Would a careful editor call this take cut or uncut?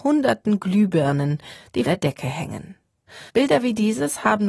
cut